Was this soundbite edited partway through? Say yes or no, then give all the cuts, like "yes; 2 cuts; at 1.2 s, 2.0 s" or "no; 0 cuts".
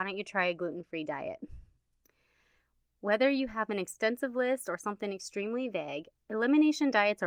no; 0 cuts